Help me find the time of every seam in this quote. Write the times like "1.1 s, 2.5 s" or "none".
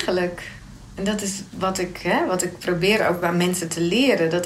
none